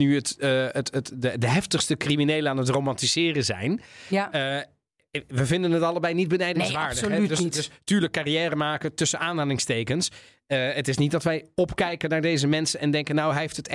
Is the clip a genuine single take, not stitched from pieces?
yes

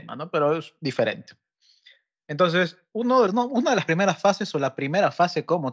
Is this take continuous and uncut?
no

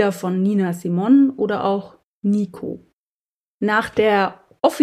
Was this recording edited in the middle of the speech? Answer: yes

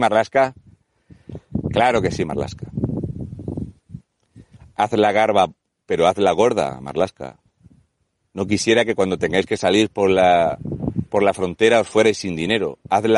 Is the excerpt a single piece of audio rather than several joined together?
yes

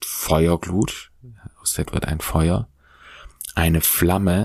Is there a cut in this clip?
yes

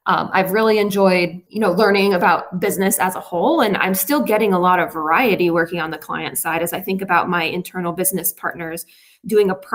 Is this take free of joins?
yes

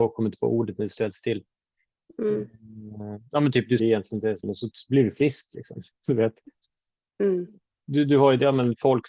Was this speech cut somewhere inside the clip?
yes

